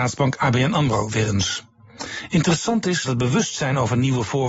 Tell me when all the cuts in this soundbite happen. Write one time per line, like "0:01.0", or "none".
0:03.0